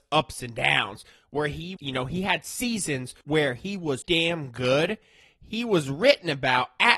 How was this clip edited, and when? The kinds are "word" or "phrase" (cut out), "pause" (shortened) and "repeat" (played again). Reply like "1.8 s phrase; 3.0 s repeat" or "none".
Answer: 1.8 s word; 3.2 s pause; 4.0 s word